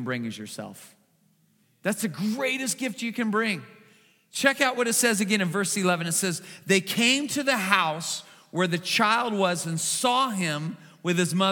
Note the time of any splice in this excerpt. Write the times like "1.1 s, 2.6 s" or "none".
none